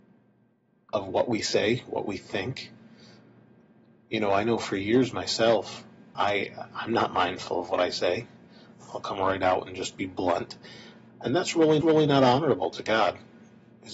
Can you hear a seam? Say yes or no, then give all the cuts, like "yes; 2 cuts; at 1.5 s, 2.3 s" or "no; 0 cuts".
yes; 2 cuts; at 6.1 s, 11.8 s